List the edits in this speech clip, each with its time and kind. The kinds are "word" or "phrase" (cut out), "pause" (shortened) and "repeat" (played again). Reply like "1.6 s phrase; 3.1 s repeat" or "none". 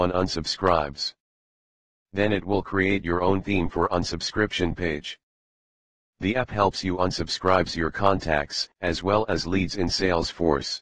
8.7 s pause

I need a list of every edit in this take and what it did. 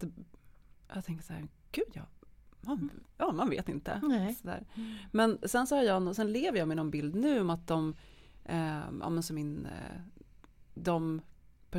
none

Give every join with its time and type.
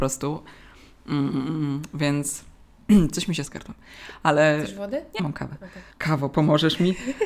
3.5 s word; 5.2 s word; 5.9 s pause

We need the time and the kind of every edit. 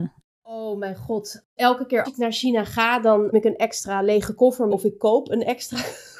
2.0 s word; 3.3 s word; 4.7 s word

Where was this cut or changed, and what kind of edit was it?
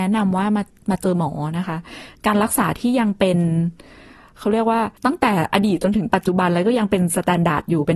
5.0 s pause

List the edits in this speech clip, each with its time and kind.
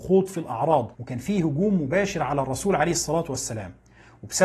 0.9 s pause

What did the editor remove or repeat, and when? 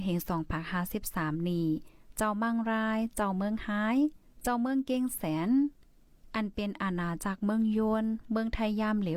4.2 s pause

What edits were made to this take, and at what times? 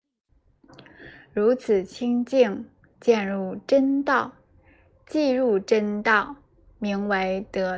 none

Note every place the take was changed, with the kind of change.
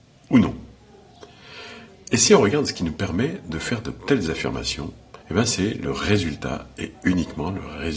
5.2 s pause

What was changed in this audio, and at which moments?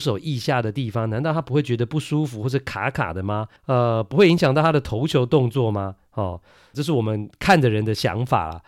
3.6 s pause; 6.7 s word

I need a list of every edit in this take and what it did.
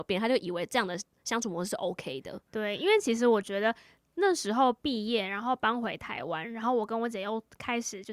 none

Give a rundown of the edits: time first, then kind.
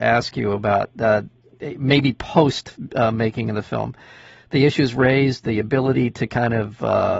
none

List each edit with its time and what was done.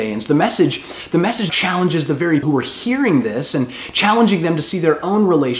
1.5 s word; 2.4 s word

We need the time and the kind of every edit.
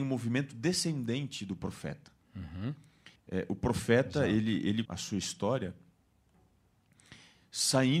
3.2 s pause; 4.8 s word

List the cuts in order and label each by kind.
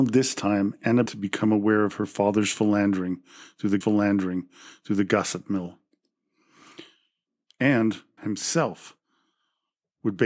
1.1 s word; 3.8 s repeat; 8.2 s word

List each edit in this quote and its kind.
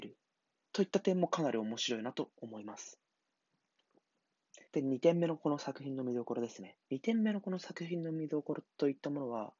4.7 s pause; 6.8 s pause

